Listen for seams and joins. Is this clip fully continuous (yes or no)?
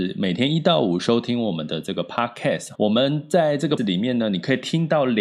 no